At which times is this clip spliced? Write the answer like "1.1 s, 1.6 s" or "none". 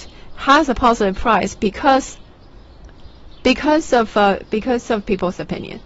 none